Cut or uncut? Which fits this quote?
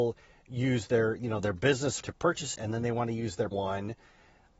cut